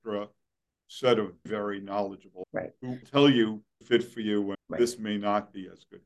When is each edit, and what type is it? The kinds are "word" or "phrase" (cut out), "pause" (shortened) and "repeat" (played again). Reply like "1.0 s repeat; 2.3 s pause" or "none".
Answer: 1.5 s word; 2.4 s word; 3.0 s word; 3.8 s phrase; 4.5 s word